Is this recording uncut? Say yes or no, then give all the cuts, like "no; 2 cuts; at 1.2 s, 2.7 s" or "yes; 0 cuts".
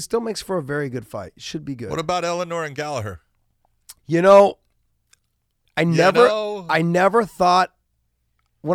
no; 1 cut; at 4.0 s